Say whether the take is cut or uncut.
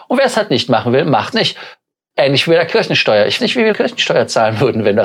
cut